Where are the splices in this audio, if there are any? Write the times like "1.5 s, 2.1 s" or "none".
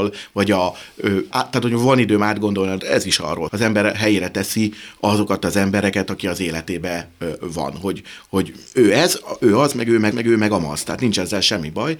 1.3 s, 2.8 s, 3.5 s, 8.7 s, 10.1 s